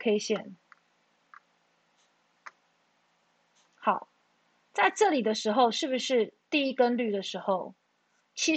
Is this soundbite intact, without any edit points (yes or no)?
yes